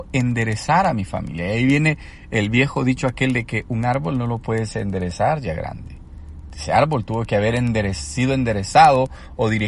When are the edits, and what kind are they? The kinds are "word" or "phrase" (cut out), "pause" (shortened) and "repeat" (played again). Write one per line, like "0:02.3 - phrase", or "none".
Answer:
none